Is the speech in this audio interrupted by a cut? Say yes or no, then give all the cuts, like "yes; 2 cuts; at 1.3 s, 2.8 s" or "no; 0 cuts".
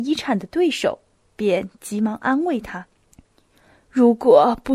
yes; 2 cuts; at 1.1 s, 2.9 s